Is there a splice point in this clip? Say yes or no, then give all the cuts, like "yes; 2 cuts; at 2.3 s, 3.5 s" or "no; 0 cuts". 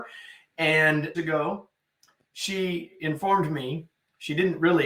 yes; 1 cut; at 1.1 s